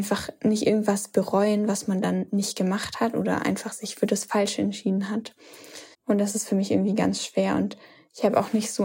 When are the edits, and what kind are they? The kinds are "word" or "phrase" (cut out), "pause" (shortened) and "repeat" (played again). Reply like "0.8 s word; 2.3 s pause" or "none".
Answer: 5.9 s pause